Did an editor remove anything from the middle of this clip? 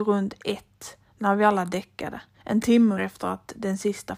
yes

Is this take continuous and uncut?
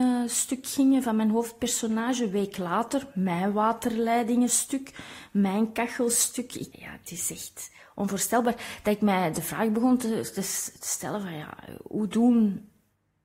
no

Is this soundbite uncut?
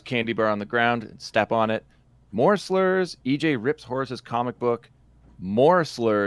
yes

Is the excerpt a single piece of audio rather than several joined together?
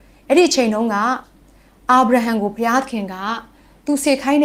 yes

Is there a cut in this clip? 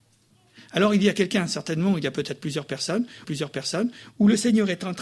yes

